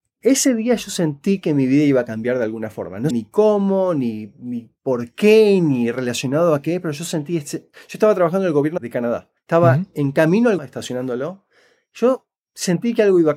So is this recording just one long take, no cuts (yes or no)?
no